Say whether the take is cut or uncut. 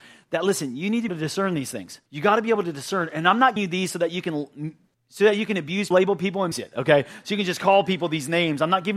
cut